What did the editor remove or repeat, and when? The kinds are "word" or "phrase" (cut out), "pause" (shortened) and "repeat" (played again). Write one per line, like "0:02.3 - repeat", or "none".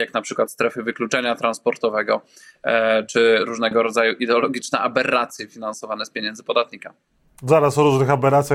none